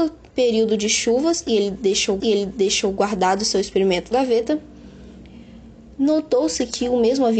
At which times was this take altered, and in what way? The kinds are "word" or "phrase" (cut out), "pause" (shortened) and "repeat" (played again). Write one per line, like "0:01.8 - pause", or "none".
0:02.2 - repeat
0:04.1 - word